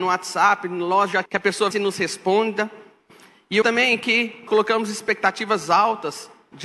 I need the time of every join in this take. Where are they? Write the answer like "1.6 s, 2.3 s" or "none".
1.3 s, 1.7 s, 3.6 s, 4.5 s